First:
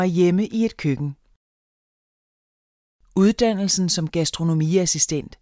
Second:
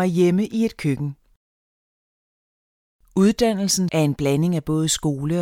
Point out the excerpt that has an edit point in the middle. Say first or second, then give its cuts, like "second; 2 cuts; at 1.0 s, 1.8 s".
second; 1 cut; at 3.9 s